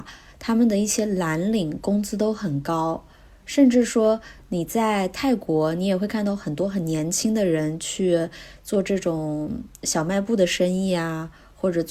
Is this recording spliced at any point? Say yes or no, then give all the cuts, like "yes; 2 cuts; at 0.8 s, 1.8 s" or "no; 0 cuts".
no; 0 cuts